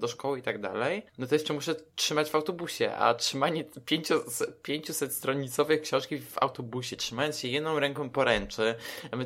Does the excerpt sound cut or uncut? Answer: cut